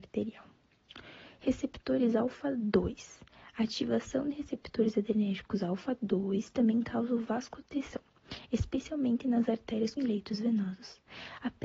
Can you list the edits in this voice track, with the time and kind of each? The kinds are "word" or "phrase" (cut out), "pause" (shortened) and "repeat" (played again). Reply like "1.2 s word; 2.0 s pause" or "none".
10.0 s phrase